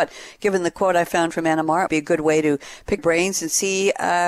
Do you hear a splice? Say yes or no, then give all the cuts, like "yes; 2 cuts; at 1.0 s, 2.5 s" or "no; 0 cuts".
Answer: yes; 2 cuts; at 1.9 s, 3.0 s